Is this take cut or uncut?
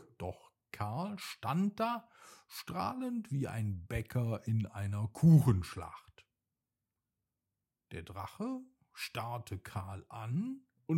uncut